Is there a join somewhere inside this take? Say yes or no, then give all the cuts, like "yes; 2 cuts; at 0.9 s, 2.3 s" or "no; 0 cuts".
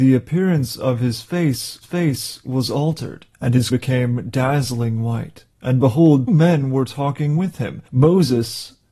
yes; 6 cuts; at 1.8 s, 3.3 s, 3.7 s, 5.5 s, 6.3 s, 7.9 s